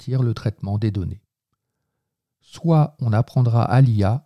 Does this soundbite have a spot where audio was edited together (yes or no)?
no